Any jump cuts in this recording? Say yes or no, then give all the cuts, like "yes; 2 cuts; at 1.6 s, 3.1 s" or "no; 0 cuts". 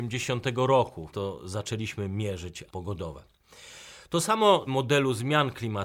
yes; 3 cuts; at 1.1 s, 2.7 s, 4.7 s